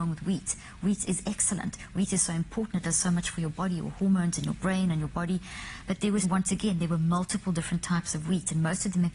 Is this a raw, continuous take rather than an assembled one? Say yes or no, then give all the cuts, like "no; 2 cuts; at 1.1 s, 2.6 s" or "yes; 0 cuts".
no; 2 cuts; at 1.0 s, 6.2 s